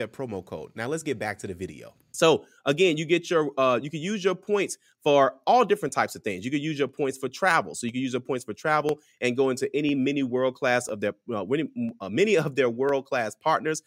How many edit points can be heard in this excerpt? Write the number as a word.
zero